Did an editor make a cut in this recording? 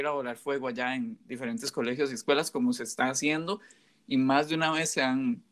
no; 0 cuts

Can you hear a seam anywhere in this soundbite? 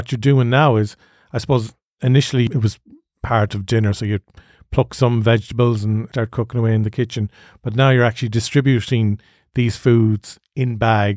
no; 0 cuts

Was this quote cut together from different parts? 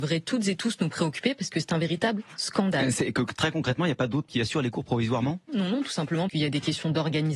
yes; 3 cuts; at 4.3 s, 5.5 s, 6.3 s

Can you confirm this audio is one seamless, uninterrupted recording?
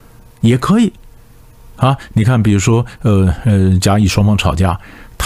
yes; 0 cuts

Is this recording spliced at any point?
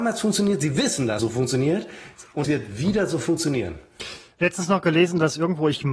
yes; 2 cuts; at 1.2 s, 2.4 s

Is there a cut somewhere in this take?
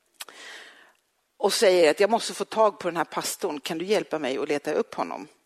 no; 0 cuts

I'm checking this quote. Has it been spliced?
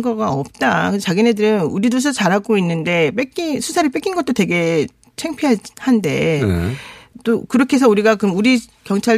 no; 0 cuts

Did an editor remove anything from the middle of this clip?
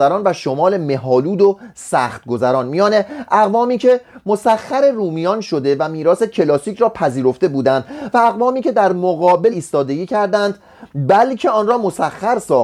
yes; 1 cut; at 9.5 s

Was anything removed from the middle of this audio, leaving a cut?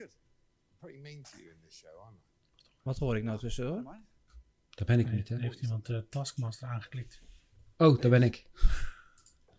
no; 0 cuts

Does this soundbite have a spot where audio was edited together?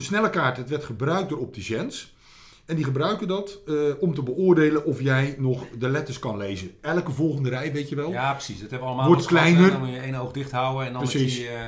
no; 0 cuts

